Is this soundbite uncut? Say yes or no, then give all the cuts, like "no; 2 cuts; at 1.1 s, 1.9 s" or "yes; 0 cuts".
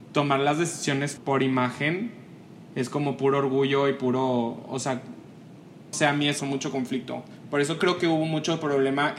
no; 3 cuts; at 1.2 s, 5.9 s, 6.4 s